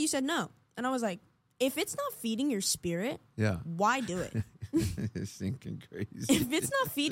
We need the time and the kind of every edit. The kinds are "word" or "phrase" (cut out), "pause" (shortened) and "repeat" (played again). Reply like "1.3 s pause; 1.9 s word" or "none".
none